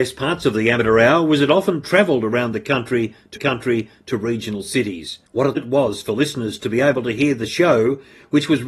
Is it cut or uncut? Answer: cut